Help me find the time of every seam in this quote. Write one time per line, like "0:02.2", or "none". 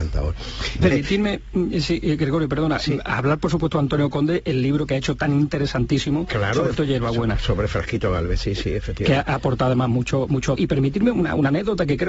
0:00.9
0:06.7
0:10.6